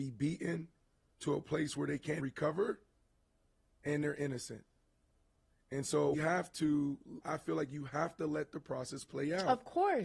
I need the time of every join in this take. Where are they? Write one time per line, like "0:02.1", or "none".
0:02.2
0:06.1
0:07.2